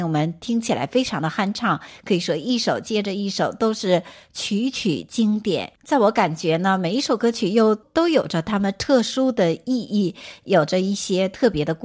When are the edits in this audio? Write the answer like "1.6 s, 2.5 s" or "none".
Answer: 5.8 s